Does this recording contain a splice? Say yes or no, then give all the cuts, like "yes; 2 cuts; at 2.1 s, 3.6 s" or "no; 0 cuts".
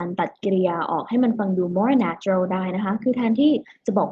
no; 0 cuts